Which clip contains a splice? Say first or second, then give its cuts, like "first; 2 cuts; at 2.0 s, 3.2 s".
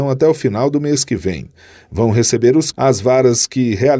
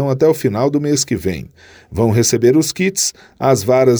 first; 1 cut; at 2.7 s